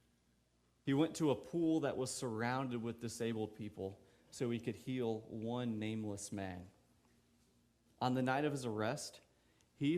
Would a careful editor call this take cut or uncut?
uncut